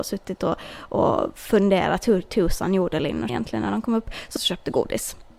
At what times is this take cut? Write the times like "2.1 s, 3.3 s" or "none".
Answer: 3.3 s, 4.4 s